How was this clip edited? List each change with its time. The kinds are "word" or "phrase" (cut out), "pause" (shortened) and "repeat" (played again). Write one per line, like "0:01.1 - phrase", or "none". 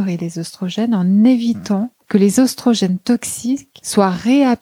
0:02.0 - pause